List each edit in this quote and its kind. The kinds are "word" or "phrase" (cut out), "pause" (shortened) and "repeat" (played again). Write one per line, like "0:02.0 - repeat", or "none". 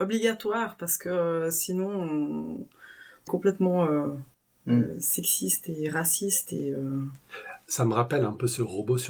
0:03.3 - phrase
0:04.3 - pause